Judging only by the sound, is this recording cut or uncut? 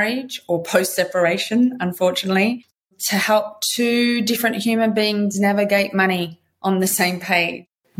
uncut